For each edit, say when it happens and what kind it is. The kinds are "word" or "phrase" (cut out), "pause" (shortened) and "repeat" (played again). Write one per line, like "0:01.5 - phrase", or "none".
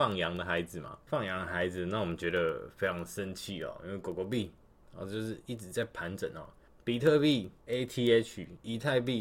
0:01.0 - pause
0:06.7 - pause
0:07.6 - pause